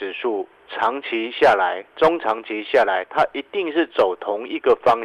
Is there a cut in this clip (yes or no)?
no